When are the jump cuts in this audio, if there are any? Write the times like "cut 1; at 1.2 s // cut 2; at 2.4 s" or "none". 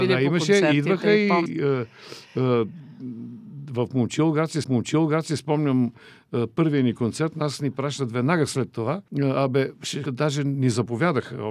cut 1; at 1.5 s // cut 2; at 4.6 s // cut 3; at 9.1 s // cut 4; at 10.0 s